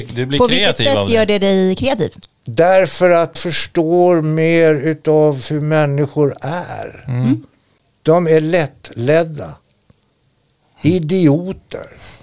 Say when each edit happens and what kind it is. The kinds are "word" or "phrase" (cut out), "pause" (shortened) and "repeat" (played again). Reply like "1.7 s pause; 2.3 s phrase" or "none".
3.4 s word